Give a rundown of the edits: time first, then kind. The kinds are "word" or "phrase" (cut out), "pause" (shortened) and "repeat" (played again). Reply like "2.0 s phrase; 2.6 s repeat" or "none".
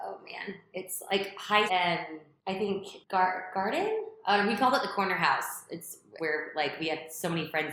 1.7 s word; 6.2 s word